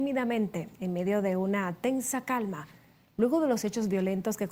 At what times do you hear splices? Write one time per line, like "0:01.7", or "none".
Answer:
none